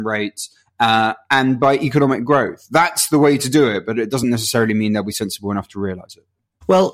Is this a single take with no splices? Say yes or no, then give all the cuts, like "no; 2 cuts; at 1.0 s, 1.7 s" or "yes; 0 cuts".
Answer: yes; 0 cuts